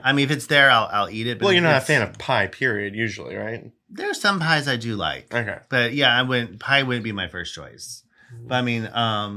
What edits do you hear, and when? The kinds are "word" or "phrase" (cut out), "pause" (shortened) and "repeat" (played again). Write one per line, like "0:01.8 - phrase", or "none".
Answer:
0:03.8 - pause